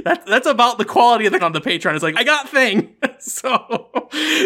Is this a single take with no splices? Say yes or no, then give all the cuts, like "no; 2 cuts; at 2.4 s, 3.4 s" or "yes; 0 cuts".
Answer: no; 2 cuts; at 1.4 s, 2.1 s